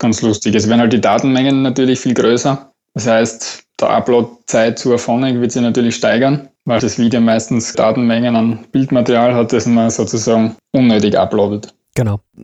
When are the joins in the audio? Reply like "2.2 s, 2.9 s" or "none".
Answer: 3.7 s, 6.8 s, 7.7 s